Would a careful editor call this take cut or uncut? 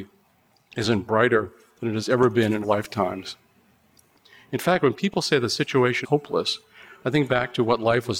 cut